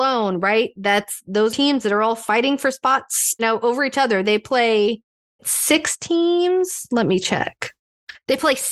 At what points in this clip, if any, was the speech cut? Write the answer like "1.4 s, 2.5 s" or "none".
1.5 s, 3.4 s, 5.4 s